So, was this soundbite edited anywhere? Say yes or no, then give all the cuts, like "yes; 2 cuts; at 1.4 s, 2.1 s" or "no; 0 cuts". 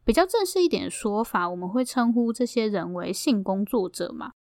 no; 0 cuts